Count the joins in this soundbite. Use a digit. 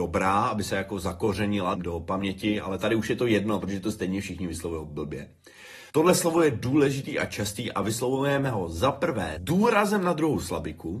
3